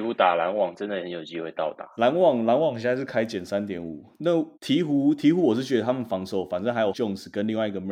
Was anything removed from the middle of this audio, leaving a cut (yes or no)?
yes